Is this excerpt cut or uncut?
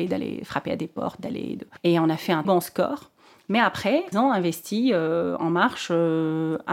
cut